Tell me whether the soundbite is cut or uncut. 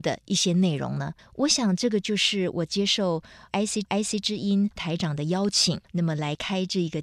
cut